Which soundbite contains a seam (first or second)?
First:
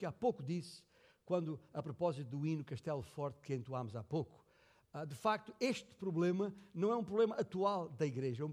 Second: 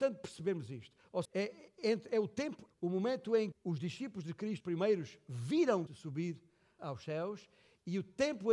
second